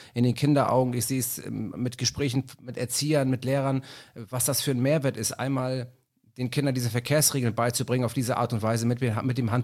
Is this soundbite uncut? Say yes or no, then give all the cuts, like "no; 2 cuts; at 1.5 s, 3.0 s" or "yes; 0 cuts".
yes; 0 cuts